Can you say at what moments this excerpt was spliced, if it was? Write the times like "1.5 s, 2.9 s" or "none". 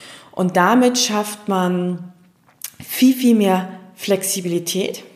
none